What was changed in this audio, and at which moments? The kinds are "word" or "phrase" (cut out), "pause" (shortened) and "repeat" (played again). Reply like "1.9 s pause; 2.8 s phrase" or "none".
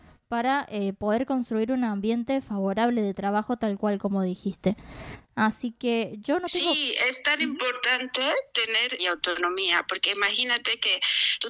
9.0 s word